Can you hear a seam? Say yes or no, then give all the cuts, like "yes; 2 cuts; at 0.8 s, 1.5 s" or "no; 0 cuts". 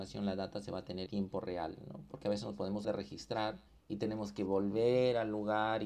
yes; 3 cuts; at 1.1 s, 2.8 s, 3.7 s